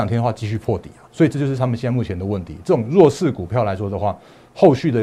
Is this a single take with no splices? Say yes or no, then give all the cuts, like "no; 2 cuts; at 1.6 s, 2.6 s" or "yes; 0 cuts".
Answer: no; 1 cut; at 1.1 s